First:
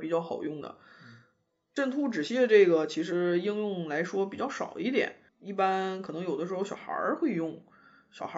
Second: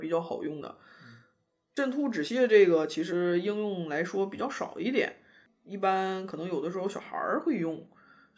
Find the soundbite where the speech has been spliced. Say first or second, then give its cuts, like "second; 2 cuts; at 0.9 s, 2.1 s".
first; 1 cut; at 5.3 s